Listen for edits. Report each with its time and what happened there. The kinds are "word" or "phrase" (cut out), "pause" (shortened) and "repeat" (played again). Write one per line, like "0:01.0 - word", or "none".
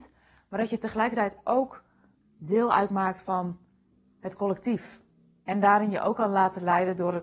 none